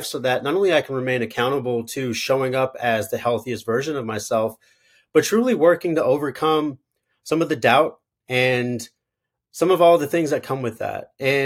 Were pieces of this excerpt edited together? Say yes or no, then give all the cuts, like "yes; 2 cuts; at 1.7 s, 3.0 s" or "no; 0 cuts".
no; 0 cuts